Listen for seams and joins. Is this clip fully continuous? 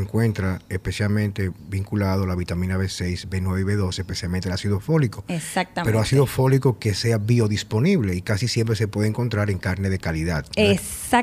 yes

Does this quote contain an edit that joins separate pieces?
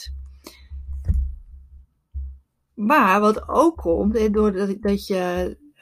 no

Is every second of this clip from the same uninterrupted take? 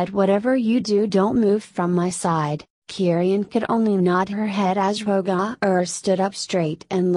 no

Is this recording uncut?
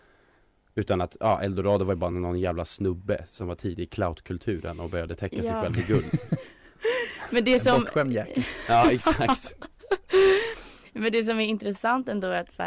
yes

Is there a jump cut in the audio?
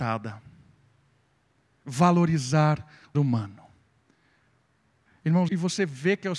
yes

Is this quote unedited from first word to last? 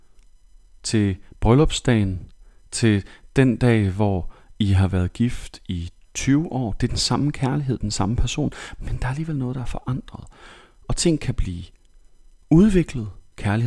yes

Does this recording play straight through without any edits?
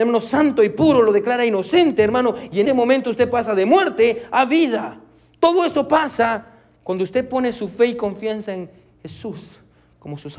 no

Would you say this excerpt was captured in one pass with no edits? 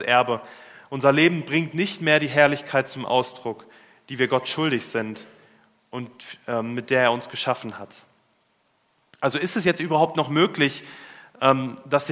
yes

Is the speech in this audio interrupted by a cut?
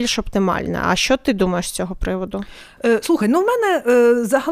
no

